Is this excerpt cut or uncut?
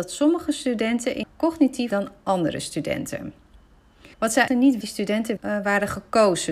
cut